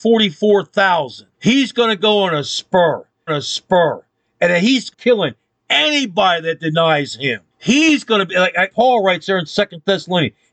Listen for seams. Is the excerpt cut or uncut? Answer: cut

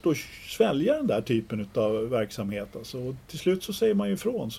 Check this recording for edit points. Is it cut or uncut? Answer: uncut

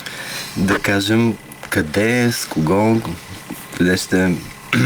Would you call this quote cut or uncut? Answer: uncut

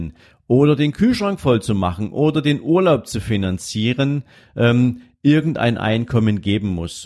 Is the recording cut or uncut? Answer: uncut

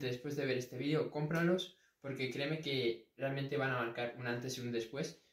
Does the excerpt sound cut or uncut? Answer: uncut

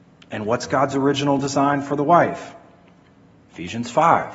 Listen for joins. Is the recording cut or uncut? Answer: uncut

